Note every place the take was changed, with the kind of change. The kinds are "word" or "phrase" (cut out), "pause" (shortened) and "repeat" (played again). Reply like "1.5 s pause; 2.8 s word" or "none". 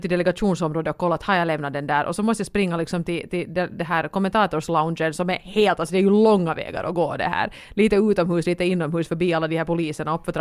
none